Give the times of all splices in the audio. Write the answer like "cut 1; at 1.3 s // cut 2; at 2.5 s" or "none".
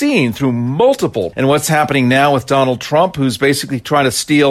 cut 1; at 1.3 s